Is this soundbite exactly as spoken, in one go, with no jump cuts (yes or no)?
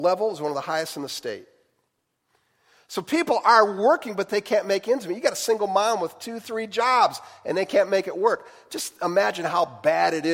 yes